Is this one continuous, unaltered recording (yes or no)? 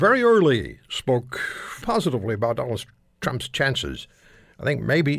no